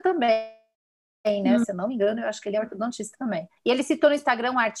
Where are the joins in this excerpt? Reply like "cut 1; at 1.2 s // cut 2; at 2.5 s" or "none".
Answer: cut 1; at 3.6 s